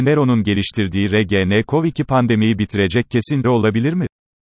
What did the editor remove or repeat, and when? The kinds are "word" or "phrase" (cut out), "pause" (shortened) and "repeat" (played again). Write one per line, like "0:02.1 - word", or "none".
0:03.4 - word